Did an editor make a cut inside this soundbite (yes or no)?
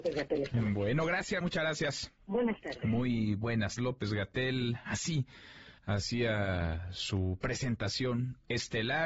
yes